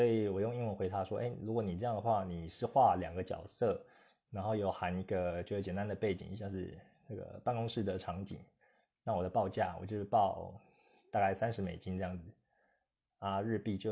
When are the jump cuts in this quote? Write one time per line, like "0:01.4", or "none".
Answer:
none